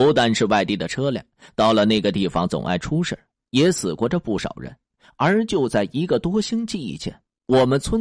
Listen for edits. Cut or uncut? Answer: uncut